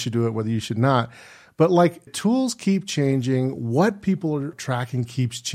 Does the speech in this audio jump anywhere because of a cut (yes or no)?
yes